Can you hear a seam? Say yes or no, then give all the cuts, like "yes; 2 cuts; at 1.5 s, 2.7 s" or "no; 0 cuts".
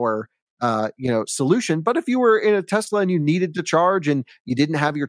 no; 0 cuts